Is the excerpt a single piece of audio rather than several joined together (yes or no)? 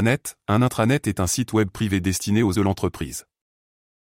no